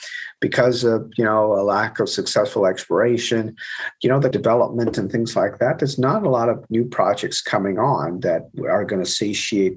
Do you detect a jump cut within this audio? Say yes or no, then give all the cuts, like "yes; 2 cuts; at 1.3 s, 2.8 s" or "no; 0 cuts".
yes; 1 cut; at 4.3 s